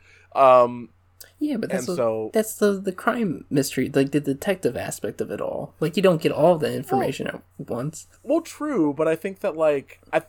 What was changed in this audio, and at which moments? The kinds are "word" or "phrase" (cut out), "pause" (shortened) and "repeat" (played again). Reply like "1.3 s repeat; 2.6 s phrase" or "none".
8.2 s pause